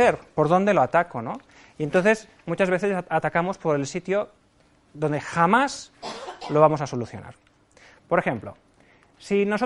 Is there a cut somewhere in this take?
no; 0 cuts

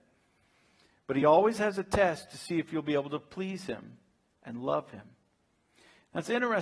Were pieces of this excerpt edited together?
no; 0 cuts

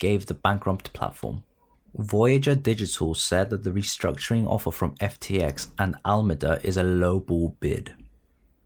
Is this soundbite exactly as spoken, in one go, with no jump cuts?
yes; 0 cuts

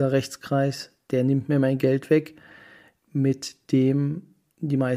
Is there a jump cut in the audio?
no; 0 cuts

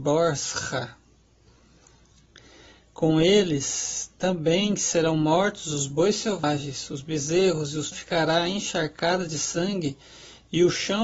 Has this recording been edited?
yes; 1 cut; at 7.9 s

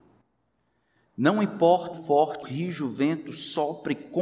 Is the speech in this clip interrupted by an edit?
yes; 2 cuts; at 1.9 s, 2.4 s

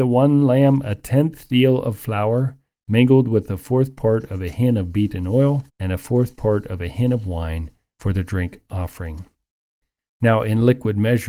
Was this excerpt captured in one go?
no; 1 cut; at 5.7 s

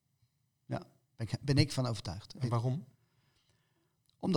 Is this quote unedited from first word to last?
yes; 0 cuts

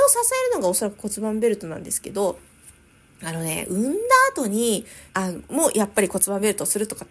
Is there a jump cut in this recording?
yes; 1 cut; at 5.1 s

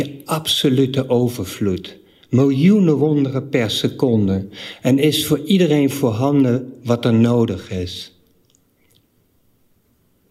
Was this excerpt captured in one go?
yes; 0 cuts

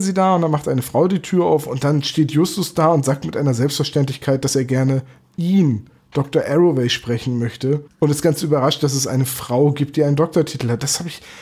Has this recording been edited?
no; 0 cuts

